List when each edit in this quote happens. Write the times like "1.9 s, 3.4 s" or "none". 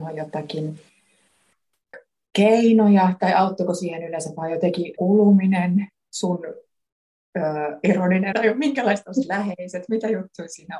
1.9 s, 5.0 s, 8.3 s

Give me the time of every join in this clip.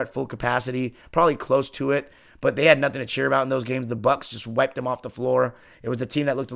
none

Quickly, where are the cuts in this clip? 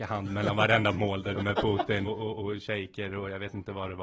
1.3 s, 2.0 s

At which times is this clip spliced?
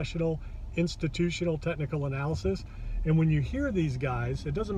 none

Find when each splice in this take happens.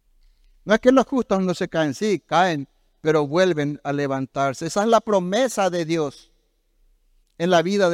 none

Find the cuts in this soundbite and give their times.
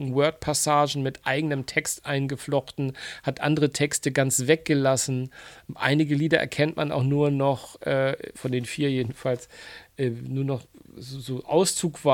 8.3 s

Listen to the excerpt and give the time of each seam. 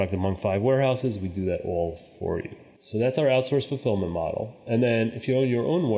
none

